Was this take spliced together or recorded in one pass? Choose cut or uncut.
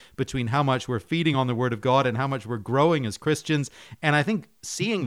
uncut